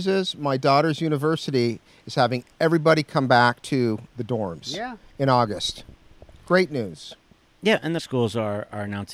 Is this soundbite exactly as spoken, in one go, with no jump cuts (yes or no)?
no